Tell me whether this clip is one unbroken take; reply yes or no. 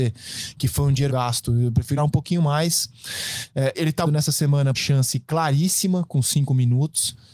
no